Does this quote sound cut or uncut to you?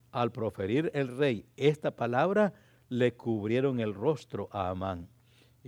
uncut